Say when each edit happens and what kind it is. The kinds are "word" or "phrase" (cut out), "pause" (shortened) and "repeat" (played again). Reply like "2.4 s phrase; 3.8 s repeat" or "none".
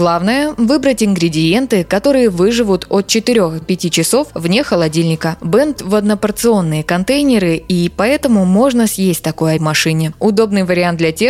3.6 s word; 5.8 s word; 9.6 s phrase